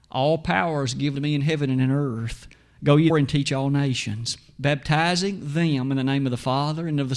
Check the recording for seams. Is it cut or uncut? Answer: cut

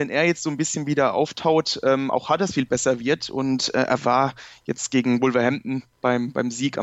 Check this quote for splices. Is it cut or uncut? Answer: uncut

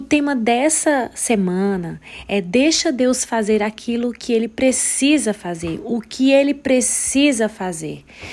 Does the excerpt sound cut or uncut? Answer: uncut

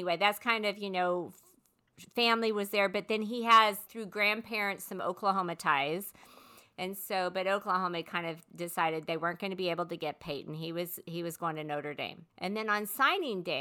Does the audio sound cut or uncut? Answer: cut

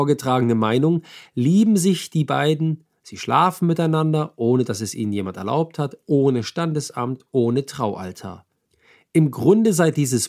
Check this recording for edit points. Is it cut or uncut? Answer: uncut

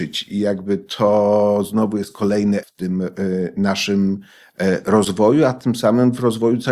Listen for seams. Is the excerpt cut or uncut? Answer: cut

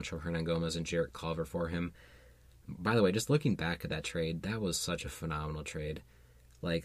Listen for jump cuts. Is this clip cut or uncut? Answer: uncut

